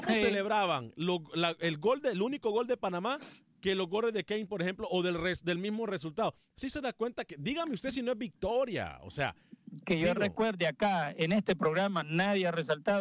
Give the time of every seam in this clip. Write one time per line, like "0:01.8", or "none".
none